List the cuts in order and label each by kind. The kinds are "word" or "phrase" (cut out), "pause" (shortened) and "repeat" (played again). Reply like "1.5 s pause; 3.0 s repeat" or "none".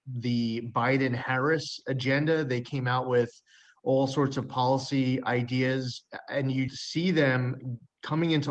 6.7 s word